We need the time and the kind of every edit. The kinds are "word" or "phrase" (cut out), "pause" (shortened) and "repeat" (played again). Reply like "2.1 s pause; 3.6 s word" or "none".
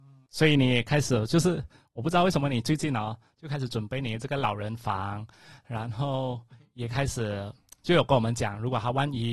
none